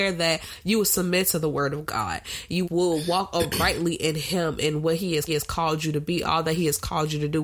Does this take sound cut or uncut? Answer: cut